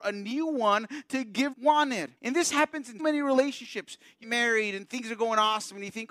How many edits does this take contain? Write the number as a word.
four